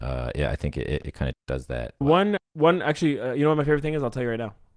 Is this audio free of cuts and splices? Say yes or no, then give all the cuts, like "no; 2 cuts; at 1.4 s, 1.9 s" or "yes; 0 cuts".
no; 3 cuts; at 1.3 s, 2.0 s, 2.4 s